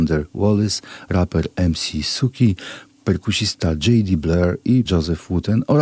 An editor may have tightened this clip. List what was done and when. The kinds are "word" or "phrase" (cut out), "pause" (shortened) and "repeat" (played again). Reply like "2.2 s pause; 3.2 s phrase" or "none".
4.8 s word